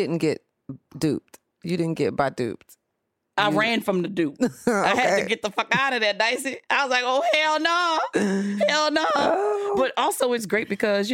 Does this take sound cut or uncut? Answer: uncut